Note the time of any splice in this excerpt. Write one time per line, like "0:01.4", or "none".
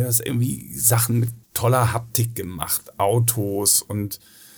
0:01.4